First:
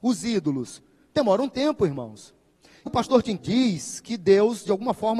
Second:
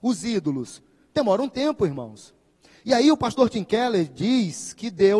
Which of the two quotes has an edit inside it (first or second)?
first